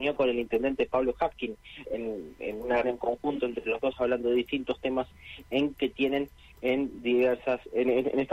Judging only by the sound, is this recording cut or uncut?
cut